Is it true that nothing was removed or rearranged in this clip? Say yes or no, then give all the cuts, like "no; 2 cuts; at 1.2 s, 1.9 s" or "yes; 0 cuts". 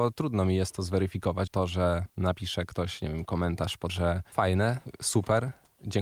no; 4 cuts; at 1.5 s, 2.1 s, 3.9 s, 4.3 s